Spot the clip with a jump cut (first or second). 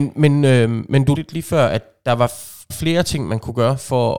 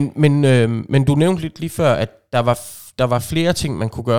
first